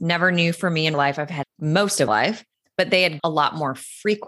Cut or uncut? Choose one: cut